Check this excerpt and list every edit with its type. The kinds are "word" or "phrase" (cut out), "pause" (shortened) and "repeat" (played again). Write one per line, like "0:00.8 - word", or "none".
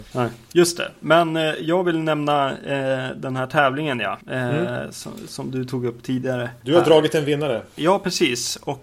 none